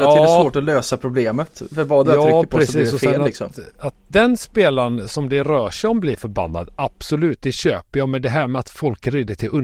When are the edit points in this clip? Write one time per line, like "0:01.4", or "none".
none